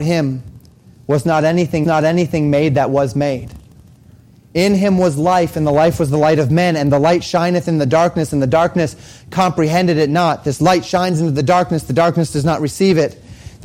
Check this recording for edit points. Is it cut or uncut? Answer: cut